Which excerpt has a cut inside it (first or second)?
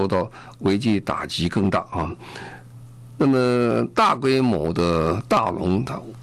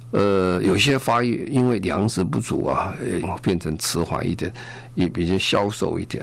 second